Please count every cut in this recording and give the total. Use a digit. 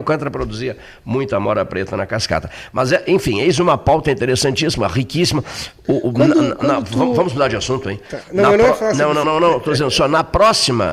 1